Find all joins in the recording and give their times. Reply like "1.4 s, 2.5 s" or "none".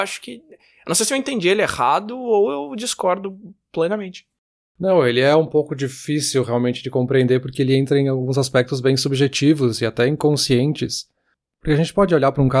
none